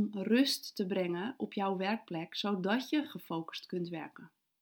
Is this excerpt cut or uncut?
uncut